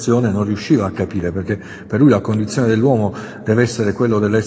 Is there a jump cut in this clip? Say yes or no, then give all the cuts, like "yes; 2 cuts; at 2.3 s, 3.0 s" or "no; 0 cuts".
no; 0 cuts